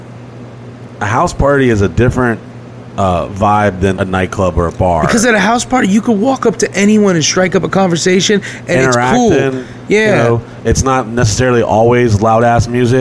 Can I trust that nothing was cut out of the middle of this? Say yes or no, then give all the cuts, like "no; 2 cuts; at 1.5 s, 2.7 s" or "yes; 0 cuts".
no; 1 cut; at 4.0 s